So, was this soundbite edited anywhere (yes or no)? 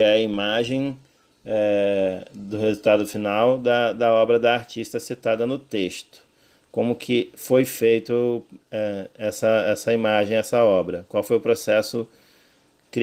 no